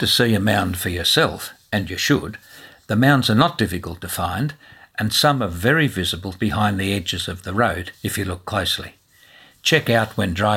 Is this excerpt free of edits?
no; 1 cut; at 6.4 s

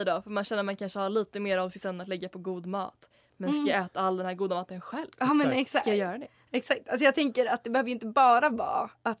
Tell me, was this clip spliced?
no; 0 cuts

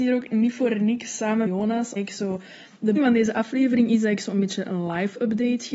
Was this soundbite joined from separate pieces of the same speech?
yes; 3 cuts; at 1.5 s, 2.0 s, 3.0 s

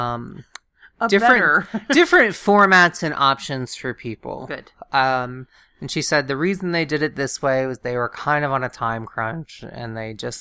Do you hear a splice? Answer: no; 0 cuts

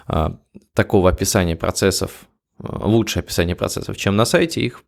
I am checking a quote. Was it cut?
no; 0 cuts

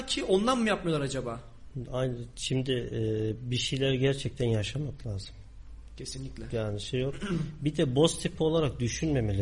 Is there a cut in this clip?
no; 0 cuts

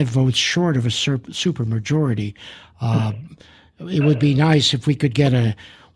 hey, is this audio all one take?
yes; 0 cuts

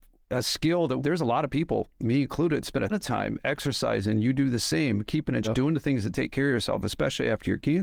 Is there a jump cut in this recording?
yes; 3 cuts; at 1.0 s, 2.9 s, 5.4 s

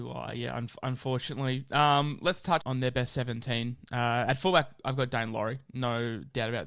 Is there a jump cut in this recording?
yes; 1 cut; at 2.6 s

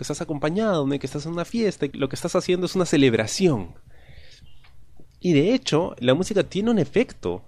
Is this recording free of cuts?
no; 3 cuts; at 1.9 s, 5.1 s, 6.0 s

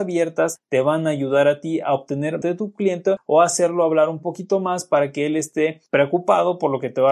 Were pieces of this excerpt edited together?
yes; 1 cut; at 2.4 s

